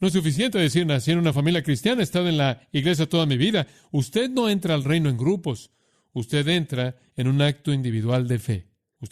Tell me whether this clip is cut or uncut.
uncut